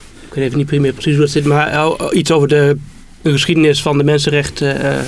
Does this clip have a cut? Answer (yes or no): no